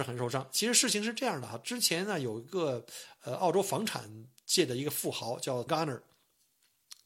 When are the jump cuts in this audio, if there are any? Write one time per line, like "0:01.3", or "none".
0:05.7